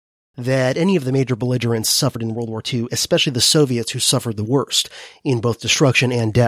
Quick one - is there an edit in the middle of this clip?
no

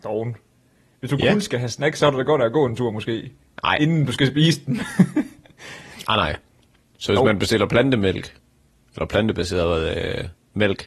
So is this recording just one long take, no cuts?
yes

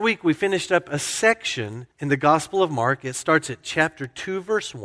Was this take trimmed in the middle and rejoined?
yes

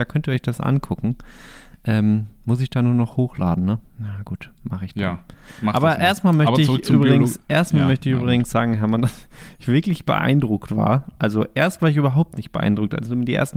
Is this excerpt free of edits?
yes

